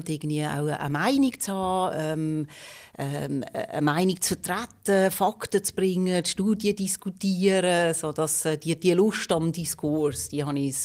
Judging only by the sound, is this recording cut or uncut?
uncut